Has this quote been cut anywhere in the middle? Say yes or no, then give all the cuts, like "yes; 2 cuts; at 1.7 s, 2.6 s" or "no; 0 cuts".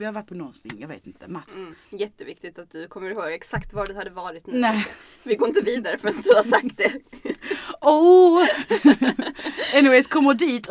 yes; 1 cut; at 1.8 s